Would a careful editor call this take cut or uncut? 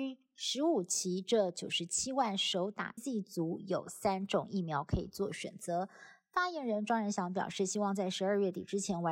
cut